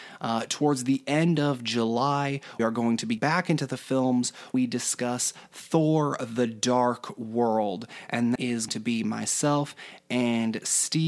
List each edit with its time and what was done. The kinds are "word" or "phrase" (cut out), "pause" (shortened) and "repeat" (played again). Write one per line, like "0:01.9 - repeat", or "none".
0:02.6 - word
0:03.2 - word
0:04.5 - word
0:08.4 - word
0:08.7 - word